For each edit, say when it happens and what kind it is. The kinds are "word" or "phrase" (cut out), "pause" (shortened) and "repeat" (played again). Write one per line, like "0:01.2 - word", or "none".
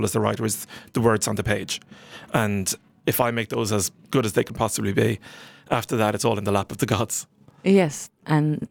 none